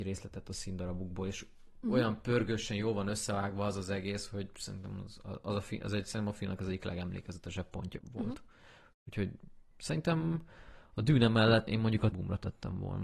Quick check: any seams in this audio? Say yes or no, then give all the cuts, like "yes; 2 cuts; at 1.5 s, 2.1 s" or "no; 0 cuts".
yes; 3 cuts; at 8.0 s, 11.7 s, 12.1 s